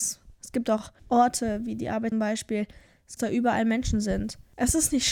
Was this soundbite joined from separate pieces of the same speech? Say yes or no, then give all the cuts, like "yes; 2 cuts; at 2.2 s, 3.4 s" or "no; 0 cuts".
yes; 3 cuts; at 1.0 s, 2.1 s, 3.2 s